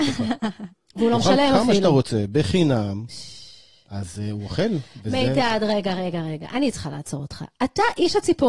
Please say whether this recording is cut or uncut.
uncut